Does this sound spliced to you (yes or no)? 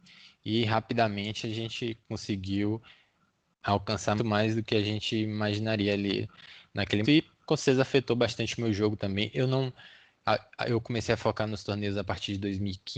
yes